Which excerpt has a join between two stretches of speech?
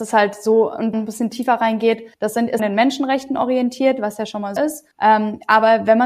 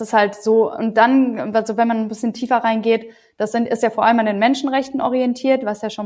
first; 5 cuts; at 0.9 s, 2.1 s, 2.6 s, 4.6 s, 4.9 s

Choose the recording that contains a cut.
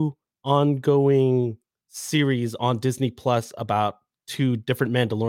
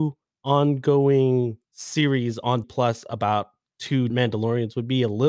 second; 3 cuts; at 1.6 s, 2.6 s, 4.1 s

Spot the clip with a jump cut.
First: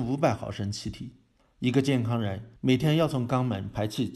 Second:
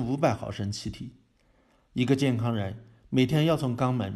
first; 2 cuts; at 1.4 s, 2.6 s

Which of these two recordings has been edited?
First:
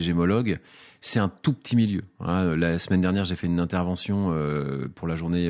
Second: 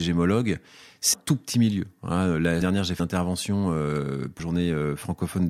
second; 4 cuts; at 1.1 s, 2.6 s, 3.0 s, 4.4 s

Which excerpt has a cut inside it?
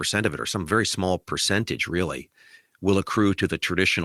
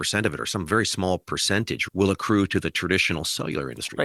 second; 1 cut; at 1.9 s

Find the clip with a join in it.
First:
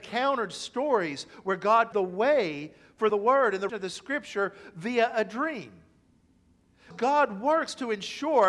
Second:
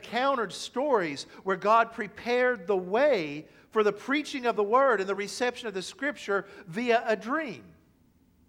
first; 4 cuts; at 1.9 s, 3.1 s, 3.7 s, 6.9 s

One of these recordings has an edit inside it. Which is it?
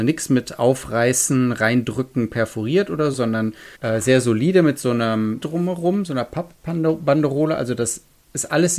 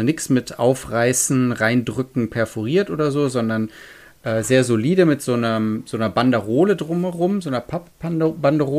first; 3 cuts; at 3.1 s, 3.7 s, 5.4 s

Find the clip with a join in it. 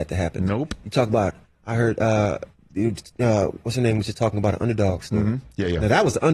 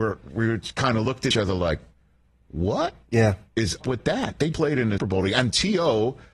second; 4 cuts; at 1.3 s, 3.8 s, 4.5 s, 5.0 s

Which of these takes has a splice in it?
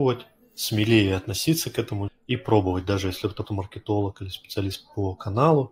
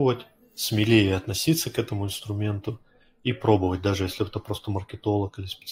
first; 2 cuts; at 2.1 s, 3.5 s

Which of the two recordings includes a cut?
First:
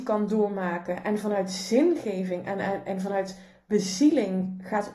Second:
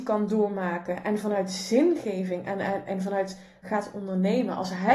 second; 1 cut; at 3.6 s

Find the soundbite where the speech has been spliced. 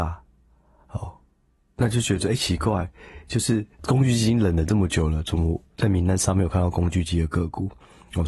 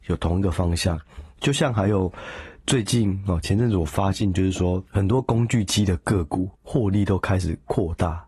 second; 2 cuts; at 4.9 s, 6.5 s

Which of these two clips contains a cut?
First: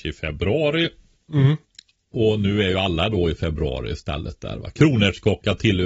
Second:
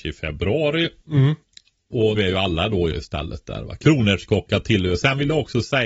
second; 3 cuts; at 1.0 s, 2.1 s, 2.9 s

